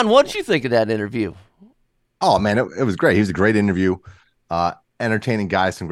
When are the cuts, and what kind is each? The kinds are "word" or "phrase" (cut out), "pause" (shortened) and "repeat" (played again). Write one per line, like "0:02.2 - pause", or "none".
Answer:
none

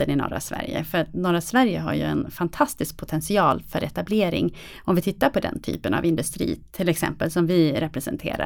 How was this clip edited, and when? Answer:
none

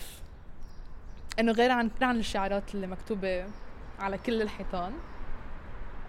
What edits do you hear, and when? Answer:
0:02.0 - word

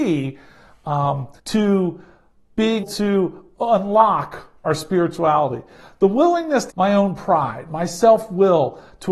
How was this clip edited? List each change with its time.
0:01.4 - pause
0:02.8 - word
0:06.7 - phrase

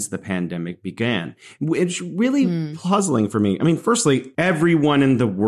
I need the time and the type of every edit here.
none

